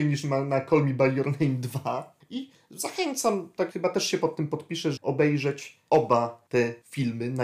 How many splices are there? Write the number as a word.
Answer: two